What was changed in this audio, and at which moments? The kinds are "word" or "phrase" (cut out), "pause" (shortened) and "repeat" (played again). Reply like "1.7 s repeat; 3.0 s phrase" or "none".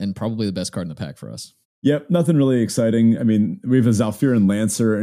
1.6 s pause